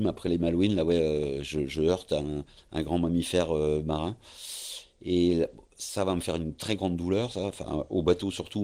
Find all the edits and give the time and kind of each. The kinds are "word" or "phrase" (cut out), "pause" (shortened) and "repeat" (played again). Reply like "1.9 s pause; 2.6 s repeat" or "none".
none